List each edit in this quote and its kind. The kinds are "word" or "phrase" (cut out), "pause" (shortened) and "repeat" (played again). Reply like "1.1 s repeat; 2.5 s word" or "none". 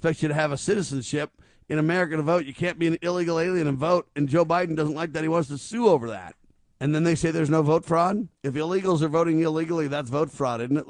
6.6 s pause; 8.4 s pause